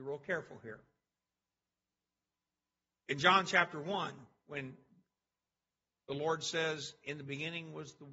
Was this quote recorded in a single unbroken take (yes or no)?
yes